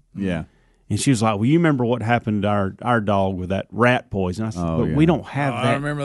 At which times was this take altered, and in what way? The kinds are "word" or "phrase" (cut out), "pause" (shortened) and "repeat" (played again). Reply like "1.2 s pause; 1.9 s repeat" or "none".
none